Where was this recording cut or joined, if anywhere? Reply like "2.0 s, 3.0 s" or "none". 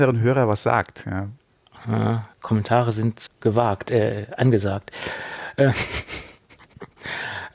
2.3 s, 3.3 s